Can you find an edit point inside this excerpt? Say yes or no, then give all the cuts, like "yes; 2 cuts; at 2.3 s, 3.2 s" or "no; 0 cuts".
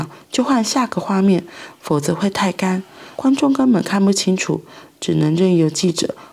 yes; 1 cut; at 3.1 s